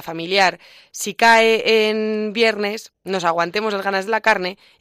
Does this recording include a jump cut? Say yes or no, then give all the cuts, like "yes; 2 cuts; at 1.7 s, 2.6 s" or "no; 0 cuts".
yes; 1 cut; at 3.0 s